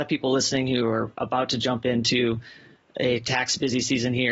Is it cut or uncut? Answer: uncut